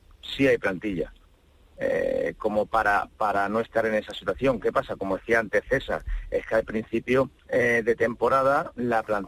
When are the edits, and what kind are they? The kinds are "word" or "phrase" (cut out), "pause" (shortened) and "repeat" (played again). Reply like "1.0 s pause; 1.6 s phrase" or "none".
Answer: 7.4 s pause